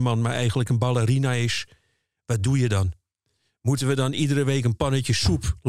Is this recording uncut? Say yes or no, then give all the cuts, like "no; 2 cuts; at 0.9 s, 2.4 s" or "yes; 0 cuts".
yes; 0 cuts